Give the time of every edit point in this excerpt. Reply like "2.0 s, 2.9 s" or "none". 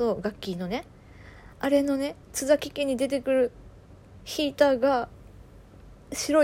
1.5 s, 2.2 s